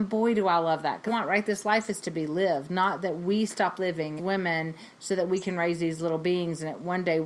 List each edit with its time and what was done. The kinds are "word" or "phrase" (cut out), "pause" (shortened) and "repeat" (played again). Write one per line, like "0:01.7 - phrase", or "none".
0:01.1 - phrase
0:04.2 - word